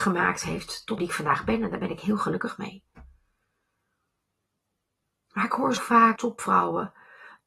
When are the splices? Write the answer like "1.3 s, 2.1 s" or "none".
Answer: 1.0 s, 5.8 s, 6.2 s